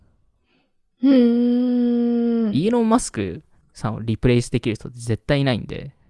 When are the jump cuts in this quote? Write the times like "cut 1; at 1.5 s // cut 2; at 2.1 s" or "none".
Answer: cut 1; at 3.6 s